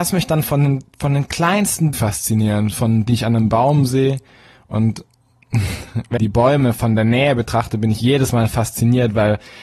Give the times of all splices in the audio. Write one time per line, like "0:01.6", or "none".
0:01.9
0:03.1
0:06.2